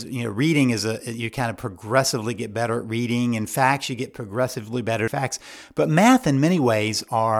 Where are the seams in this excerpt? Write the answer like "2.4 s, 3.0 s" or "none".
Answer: 5.1 s